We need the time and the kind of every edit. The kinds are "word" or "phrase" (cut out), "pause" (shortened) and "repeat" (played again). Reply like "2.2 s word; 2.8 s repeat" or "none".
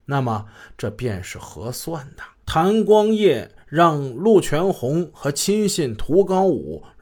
2.4 s pause